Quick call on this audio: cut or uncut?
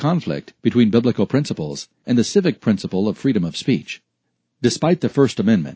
uncut